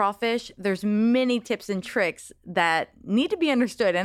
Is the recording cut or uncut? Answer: uncut